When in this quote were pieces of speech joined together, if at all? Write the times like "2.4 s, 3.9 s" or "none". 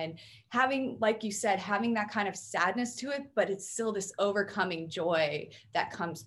none